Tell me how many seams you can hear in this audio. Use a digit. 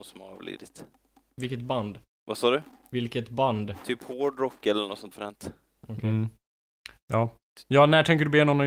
2